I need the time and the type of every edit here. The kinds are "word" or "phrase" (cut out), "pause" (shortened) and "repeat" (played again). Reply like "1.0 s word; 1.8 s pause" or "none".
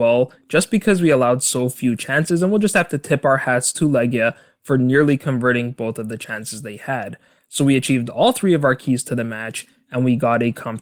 none